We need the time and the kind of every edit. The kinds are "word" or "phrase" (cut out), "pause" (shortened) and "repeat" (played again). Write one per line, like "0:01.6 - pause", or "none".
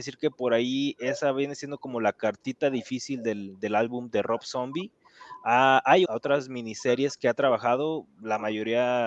0:06.1 - word